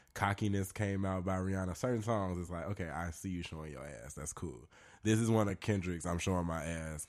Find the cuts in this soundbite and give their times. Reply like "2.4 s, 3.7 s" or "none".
none